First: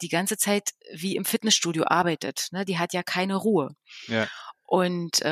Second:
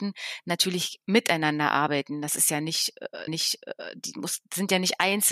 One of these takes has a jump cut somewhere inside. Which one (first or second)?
second